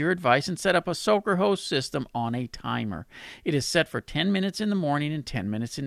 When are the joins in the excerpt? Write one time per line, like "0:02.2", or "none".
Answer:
none